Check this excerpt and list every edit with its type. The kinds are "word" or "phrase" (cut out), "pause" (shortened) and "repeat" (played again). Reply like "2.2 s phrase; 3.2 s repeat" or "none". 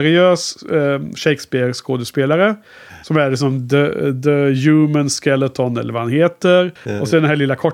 6.8 s pause